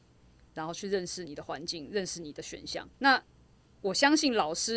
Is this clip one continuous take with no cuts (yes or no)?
no